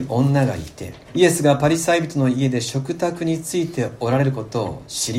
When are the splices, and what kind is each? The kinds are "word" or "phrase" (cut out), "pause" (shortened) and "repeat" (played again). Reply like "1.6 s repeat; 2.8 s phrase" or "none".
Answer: 1.0 s pause